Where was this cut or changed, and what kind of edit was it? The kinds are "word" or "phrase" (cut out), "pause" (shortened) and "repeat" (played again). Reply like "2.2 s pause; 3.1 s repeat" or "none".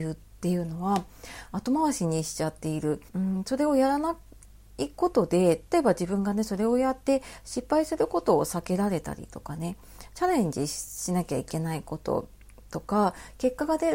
3.1 s pause